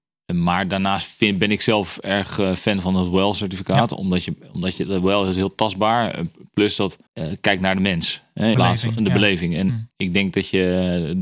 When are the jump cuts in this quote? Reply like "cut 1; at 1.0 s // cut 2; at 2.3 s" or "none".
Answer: cut 1; at 7.1 s // cut 2; at 8.5 s // cut 3; at 9.9 s